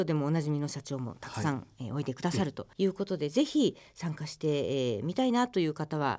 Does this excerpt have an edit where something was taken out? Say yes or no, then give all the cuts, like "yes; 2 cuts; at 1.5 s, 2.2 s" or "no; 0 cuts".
yes; 1 cut; at 2.7 s